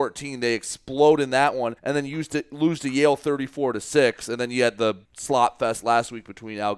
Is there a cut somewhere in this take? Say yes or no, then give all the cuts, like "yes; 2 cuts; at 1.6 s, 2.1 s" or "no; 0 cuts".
yes; 2 cuts; at 1.8 s, 5.0 s